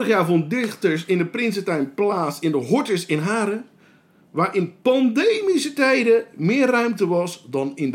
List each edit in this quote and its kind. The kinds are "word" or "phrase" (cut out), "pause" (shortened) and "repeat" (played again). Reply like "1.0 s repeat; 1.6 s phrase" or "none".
none